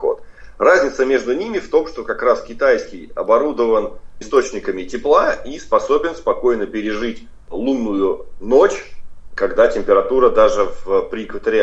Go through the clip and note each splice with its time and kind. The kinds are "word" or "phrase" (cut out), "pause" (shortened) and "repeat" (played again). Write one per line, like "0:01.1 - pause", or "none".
0:04.2 - word